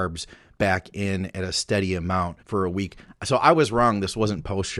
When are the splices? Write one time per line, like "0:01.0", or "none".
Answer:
0:02.4